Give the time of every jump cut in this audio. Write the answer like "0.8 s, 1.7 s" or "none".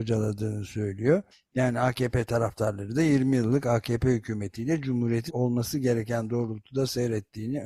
1.3 s, 5.3 s